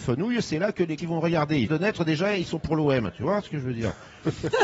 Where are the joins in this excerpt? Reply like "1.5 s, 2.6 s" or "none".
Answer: 1.0 s, 1.7 s